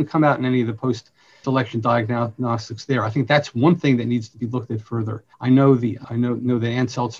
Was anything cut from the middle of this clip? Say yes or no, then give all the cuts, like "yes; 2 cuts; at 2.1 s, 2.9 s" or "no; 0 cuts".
yes; 3 cuts; at 1.4 s, 5.3 s, 6.0 s